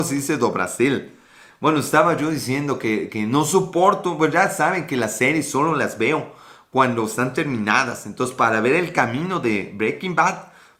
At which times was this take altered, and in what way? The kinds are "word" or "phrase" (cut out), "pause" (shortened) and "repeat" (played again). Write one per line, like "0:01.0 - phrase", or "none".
none